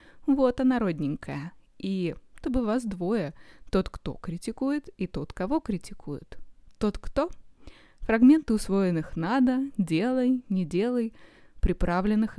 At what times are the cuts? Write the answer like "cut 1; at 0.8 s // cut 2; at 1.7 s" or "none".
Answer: cut 1; at 2.4 s